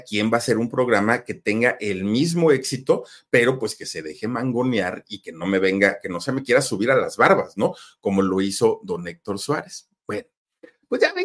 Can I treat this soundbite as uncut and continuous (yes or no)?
yes